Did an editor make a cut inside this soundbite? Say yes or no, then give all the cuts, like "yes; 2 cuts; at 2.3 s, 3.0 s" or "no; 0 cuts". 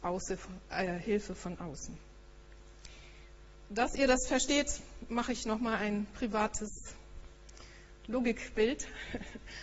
no; 0 cuts